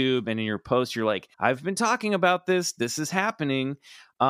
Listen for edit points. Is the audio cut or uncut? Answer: cut